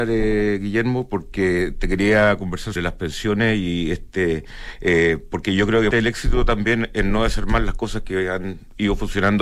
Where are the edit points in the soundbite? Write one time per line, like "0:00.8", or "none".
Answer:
0:02.8
0:05.9

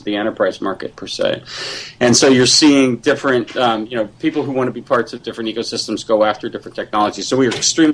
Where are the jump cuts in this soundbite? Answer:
none

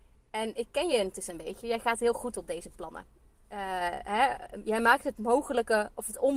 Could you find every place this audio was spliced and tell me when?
none

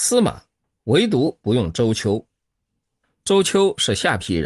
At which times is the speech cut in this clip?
none

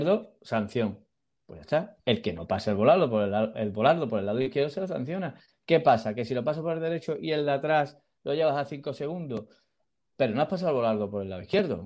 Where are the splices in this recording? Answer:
none

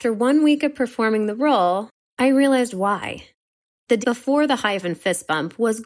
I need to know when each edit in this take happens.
0:04.0
0:04.8

